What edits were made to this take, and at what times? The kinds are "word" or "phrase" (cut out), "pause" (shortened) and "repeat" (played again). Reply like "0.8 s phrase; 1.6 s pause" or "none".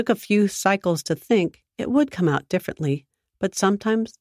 1.7 s pause

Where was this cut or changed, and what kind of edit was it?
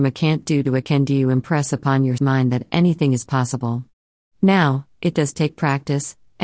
2.2 s word

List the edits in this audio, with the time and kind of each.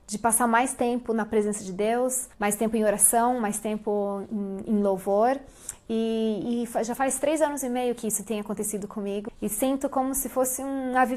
2.3 s pause; 9.3 s word

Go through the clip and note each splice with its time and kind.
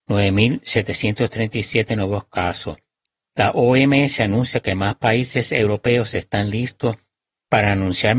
none

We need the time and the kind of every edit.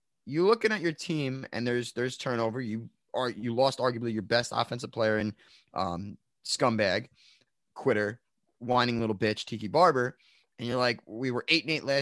none

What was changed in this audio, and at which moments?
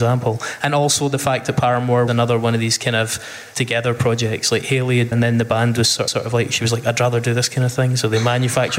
2.1 s word; 3.5 s word; 5.1 s phrase; 6.1 s repeat

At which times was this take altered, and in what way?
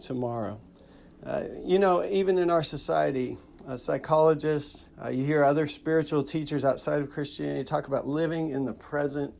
4.9 s pause

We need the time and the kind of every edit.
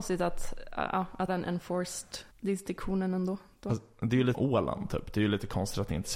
1.3 s word; 2.3 s pause; 4.3 s word

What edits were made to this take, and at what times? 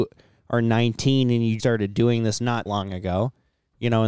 1.6 s word; 2.7 s word

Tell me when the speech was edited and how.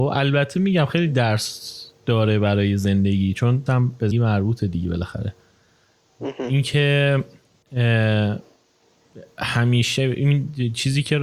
3.7 s word; 4.1 s word

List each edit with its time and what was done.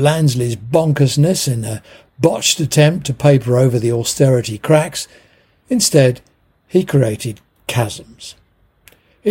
none

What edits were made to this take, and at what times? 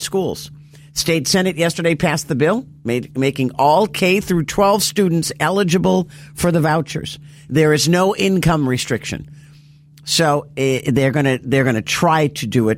none

